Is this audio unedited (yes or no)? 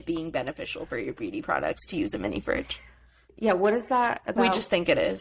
yes